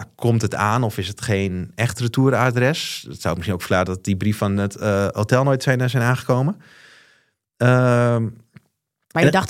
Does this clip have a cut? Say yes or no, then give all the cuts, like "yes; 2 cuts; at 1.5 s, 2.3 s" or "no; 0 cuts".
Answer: no; 0 cuts